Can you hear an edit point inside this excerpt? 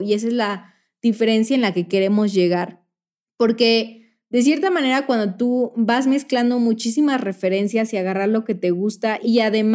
no; 0 cuts

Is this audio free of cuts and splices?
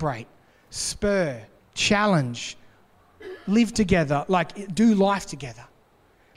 no; 1 cut; at 1.6 s

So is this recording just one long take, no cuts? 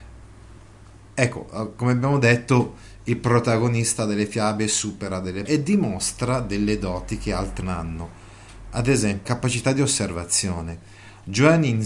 no; 3 cuts; at 5.5 s, 7.6 s, 9.3 s

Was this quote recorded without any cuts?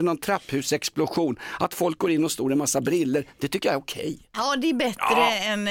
yes; 0 cuts

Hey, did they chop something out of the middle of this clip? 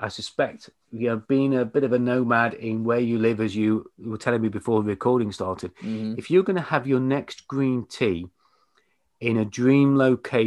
no; 0 cuts

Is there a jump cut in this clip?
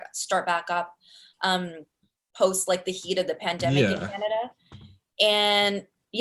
no; 0 cuts

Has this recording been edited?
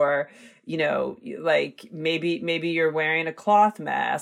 no; 0 cuts

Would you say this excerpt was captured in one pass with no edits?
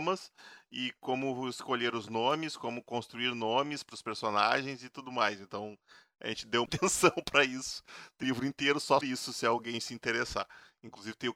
no; 3 cuts; at 6.7 s, 8.2 s, 9.0 s

